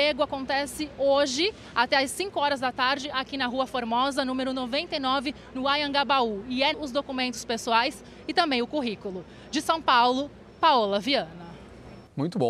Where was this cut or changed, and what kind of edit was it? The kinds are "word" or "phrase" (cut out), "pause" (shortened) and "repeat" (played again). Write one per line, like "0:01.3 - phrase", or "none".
0:06.7 - phrase